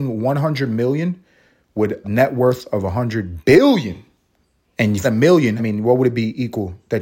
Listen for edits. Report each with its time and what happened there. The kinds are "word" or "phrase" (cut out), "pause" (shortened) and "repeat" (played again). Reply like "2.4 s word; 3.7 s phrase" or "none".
2.0 s word; 4.4 s pause; 5.0 s phrase; 5.6 s phrase